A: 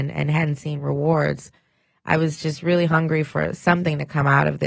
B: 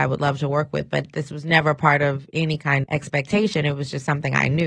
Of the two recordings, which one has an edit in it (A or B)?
B